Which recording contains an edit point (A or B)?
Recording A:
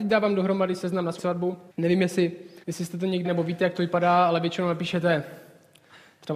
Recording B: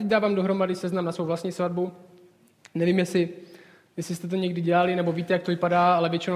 A